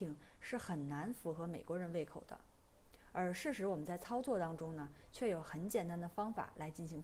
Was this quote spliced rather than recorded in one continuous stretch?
no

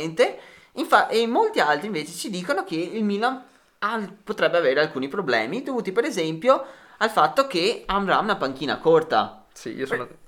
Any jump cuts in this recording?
no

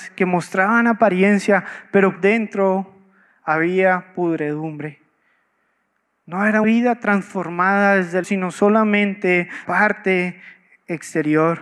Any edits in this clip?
yes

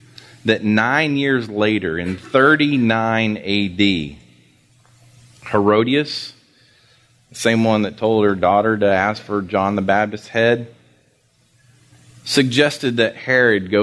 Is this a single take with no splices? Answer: yes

